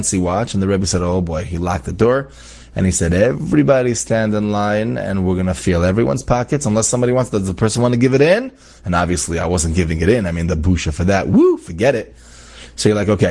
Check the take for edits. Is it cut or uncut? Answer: uncut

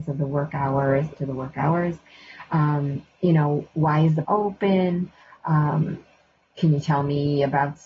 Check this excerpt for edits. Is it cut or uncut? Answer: cut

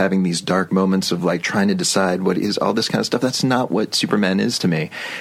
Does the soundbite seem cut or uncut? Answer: uncut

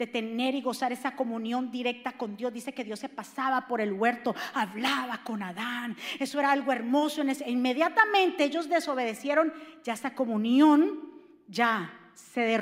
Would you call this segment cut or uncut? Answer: uncut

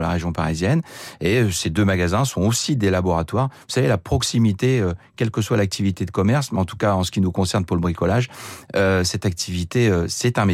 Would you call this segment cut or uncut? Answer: uncut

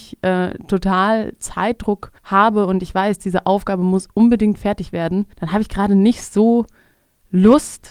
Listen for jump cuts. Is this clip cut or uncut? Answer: cut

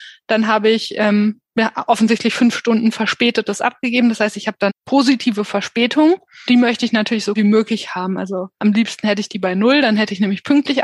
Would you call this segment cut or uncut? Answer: cut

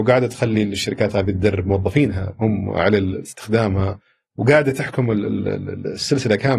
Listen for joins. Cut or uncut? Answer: uncut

